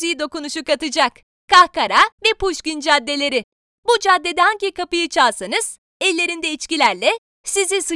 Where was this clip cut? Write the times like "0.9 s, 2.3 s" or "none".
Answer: 2.1 s